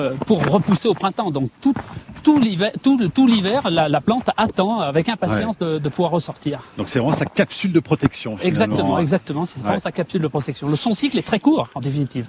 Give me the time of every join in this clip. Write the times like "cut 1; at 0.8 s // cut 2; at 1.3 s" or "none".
none